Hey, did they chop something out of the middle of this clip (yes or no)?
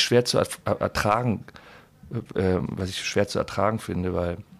no